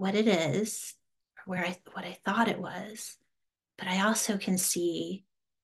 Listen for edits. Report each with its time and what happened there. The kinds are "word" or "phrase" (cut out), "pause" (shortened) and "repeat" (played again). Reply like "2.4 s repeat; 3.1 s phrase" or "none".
none